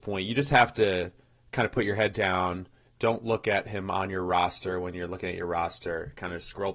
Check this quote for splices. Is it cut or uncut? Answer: uncut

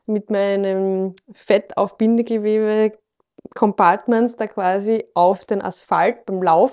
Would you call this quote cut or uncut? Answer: uncut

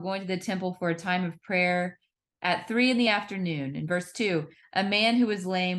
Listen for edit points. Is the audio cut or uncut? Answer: uncut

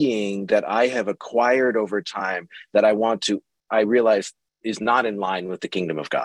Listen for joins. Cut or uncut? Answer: uncut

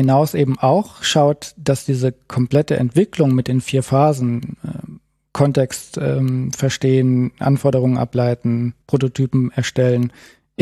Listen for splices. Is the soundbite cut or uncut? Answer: cut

